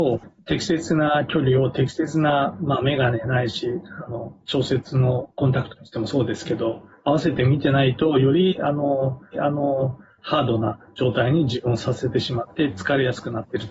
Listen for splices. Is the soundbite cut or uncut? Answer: cut